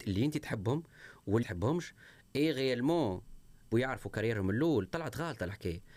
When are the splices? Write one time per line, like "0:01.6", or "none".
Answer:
0:01.4
0:03.7